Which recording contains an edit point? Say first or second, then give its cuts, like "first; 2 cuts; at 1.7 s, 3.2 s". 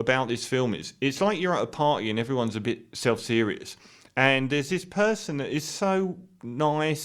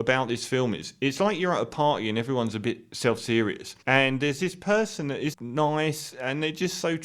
second; 2 cuts; at 3.8 s, 5.3 s